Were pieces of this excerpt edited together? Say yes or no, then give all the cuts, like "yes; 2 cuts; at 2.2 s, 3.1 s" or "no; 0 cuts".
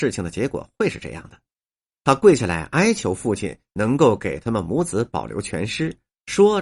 no; 0 cuts